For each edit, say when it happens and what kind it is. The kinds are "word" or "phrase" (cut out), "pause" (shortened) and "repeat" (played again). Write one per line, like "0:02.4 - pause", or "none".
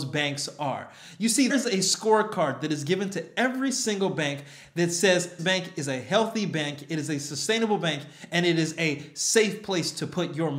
0:01.5 - word
0:05.4 - word